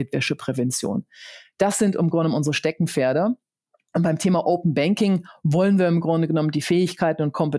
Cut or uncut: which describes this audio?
uncut